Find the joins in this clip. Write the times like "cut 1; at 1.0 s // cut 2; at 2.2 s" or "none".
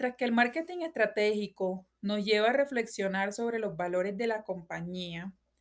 none

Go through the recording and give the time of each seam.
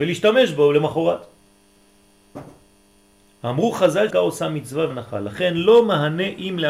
cut 1; at 4.1 s // cut 2; at 4.9 s

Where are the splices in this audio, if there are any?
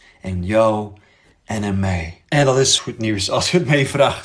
cut 1; at 2.8 s

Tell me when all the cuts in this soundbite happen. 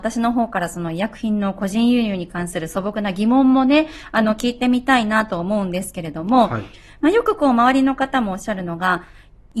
none

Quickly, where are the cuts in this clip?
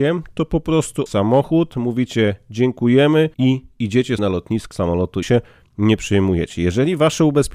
cut 1; at 1.1 s // cut 2; at 3.3 s // cut 3; at 4.2 s // cut 4; at 4.7 s // cut 5; at 5.2 s

